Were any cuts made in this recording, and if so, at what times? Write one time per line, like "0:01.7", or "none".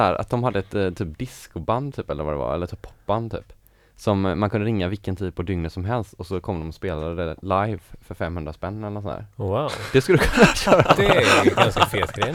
none